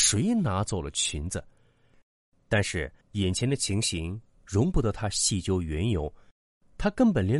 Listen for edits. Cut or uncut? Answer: cut